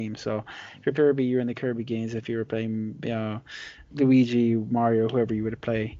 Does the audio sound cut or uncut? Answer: cut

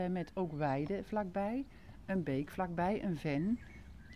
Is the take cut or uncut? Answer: uncut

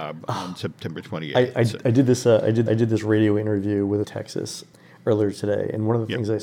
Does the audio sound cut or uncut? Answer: cut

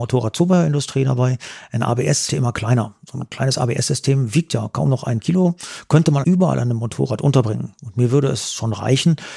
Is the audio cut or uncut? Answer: cut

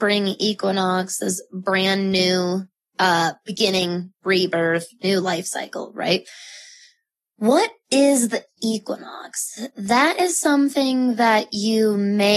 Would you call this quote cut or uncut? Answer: uncut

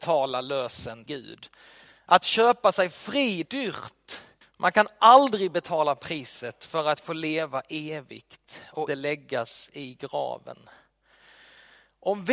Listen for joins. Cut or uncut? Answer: cut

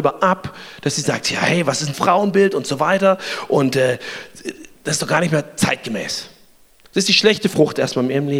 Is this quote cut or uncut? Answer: cut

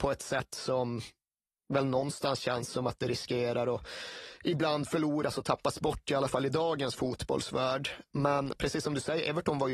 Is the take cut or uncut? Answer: uncut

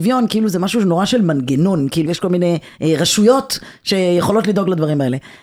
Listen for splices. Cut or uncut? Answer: cut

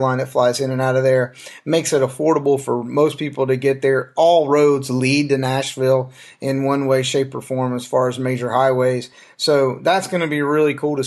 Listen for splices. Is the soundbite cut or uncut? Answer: uncut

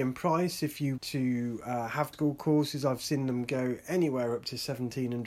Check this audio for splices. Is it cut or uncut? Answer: cut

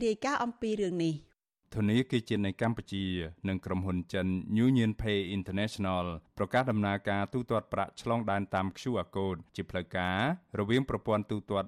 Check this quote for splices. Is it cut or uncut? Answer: uncut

